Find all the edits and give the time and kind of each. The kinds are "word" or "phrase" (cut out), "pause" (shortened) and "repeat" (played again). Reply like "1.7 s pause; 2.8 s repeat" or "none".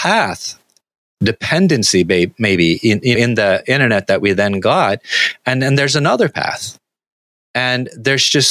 3.1 s word